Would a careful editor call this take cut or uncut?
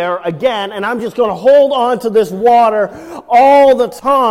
uncut